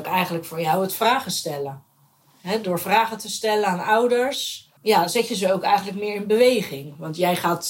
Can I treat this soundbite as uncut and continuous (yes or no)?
no